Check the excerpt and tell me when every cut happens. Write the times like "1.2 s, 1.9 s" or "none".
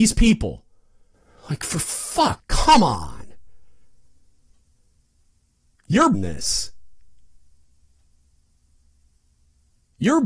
1.1 s, 2.4 s, 6.1 s